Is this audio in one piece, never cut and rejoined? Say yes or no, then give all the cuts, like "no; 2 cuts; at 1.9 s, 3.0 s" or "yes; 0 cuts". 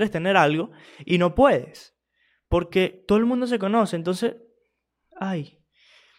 yes; 0 cuts